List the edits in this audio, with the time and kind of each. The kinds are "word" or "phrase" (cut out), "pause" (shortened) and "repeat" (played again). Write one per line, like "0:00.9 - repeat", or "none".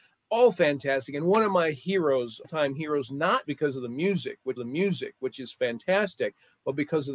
0:02.4 - word
0:03.4 - word
0:04.6 - repeat

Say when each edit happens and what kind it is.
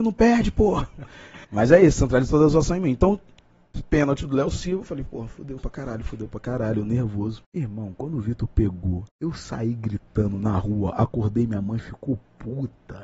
0:01.4 - pause
0:05.6 - word
0:07.4 - pause
0:09.1 - pause

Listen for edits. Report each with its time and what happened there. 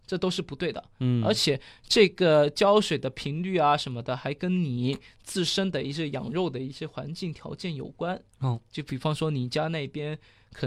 none

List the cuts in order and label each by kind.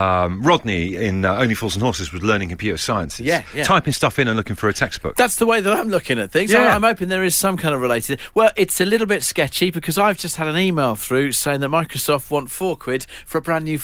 none

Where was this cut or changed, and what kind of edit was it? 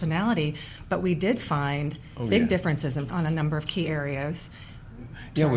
0:03.1 - word

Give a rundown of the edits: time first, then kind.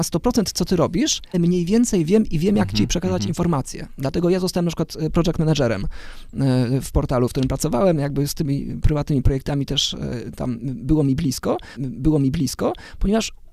0:01.3 - word
0:11.8 - repeat

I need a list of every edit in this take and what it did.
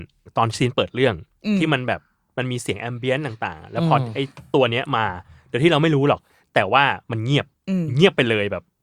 0:07.0 - pause

